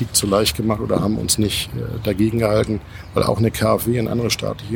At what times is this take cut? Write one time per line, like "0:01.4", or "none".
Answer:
none